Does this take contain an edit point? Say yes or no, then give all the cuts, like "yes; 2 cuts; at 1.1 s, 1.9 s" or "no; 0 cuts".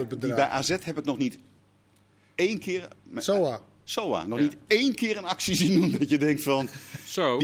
no; 0 cuts